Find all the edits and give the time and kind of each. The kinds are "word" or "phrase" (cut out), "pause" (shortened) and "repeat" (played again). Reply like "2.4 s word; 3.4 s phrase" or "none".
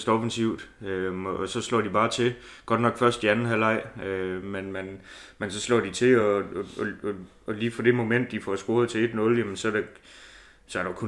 none